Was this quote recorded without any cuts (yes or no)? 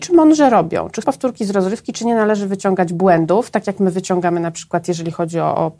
no